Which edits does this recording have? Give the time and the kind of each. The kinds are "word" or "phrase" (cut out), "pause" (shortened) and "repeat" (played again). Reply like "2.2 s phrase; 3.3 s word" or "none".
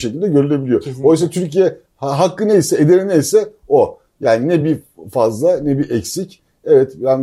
none